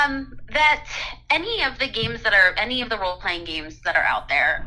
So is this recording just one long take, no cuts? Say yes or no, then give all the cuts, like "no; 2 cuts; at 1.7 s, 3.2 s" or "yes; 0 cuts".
yes; 0 cuts